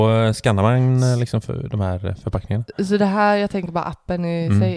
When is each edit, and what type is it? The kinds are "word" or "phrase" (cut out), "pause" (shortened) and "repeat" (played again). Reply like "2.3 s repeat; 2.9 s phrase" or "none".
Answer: none